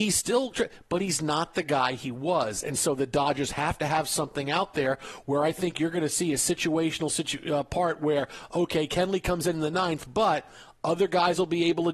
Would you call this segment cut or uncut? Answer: uncut